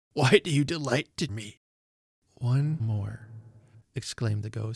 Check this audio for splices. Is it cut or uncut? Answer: cut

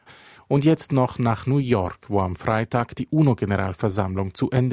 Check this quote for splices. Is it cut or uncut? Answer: uncut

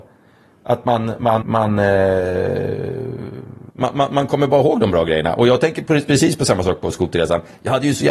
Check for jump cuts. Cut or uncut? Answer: cut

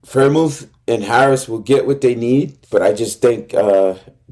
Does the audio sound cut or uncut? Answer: cut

